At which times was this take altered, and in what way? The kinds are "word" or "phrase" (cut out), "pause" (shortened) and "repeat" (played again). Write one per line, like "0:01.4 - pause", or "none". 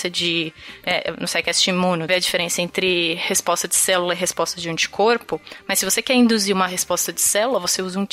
0:02.1 - phrase